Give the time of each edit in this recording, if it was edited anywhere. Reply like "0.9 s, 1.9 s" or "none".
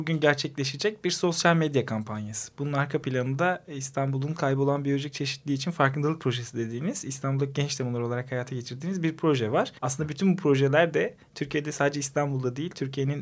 9.8 s